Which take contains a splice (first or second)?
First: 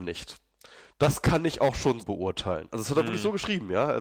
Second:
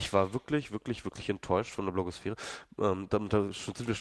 first